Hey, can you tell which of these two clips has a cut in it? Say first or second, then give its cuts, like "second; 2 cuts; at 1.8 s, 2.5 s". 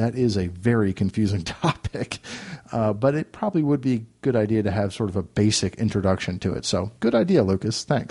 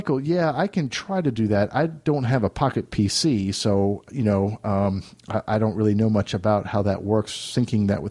first; 1 cut; at 7.0 s